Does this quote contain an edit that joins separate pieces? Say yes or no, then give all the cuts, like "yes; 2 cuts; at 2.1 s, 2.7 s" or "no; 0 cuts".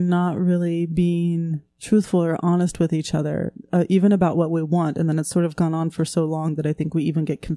yes; 1 cut; at 1.7 s